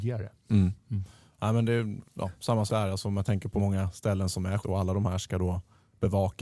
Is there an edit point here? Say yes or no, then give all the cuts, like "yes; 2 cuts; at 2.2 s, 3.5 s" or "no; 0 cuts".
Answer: yes; 4 cuts; at 2.0 s, 2.7 s, 3.6 s, 4.6 s